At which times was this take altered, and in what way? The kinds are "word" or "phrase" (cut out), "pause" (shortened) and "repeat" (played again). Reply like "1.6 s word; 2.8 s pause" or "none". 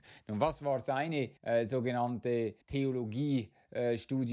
1.4 s pause; 2.6 s pause